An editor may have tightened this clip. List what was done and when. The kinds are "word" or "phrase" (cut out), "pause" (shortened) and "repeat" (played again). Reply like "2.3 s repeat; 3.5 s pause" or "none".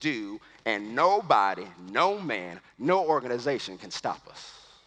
none